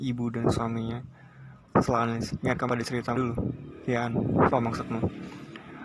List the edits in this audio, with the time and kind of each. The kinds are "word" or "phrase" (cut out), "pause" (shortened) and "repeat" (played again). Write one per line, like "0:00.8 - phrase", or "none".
0:01.6 - word
0:02.7 - word
0:03.1 - word
0:04.5 - word